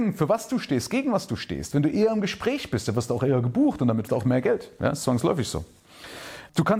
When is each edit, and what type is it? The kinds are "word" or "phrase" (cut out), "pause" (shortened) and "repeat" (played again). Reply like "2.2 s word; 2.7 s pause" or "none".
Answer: 4.1 s word